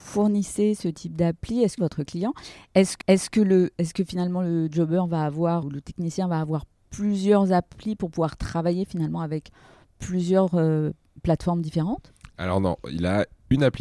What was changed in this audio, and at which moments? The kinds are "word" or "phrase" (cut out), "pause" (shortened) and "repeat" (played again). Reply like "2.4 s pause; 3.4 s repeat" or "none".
1.8 s phrase; 3.0 s repeat; 5.6 s word